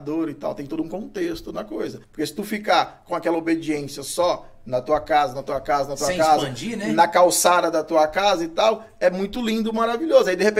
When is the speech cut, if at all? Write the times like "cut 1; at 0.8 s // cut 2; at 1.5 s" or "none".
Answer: cut 1; at 2.0 s